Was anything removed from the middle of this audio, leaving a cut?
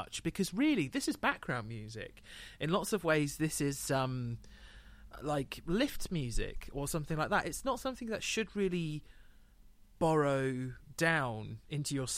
no; 0 cuts

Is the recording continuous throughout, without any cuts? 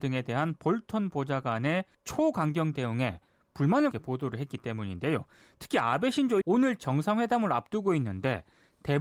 no; 3 cuts; at 1.9 s, 3.9 s, 6.4 s

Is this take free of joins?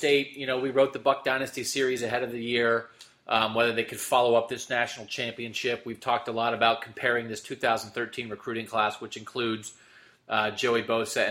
yes; 0 cuts

